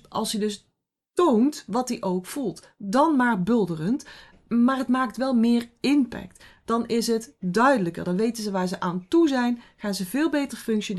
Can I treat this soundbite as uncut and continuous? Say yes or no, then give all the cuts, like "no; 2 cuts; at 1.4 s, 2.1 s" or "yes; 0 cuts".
yes; 0 cuts